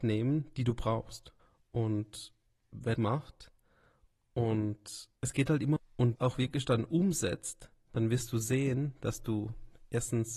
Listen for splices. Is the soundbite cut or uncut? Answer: cut